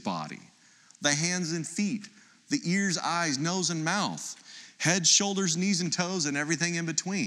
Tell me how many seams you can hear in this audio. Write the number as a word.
zero